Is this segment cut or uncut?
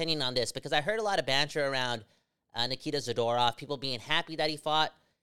uncut